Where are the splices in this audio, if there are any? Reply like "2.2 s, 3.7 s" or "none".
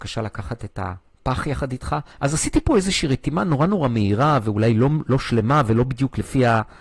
2.1 s